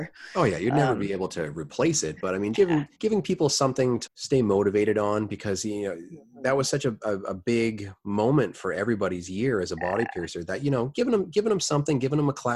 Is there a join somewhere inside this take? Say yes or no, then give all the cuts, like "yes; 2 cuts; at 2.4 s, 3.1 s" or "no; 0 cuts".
yes; 3 cuts; at 2.5 s, 2.9 s, 4.1 s